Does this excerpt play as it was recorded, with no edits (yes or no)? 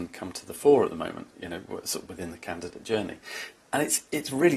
yes